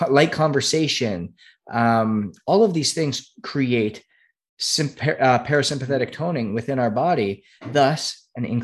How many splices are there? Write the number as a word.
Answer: zero